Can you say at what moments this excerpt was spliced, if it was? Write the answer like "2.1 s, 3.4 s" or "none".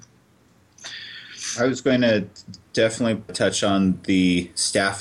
3.3 s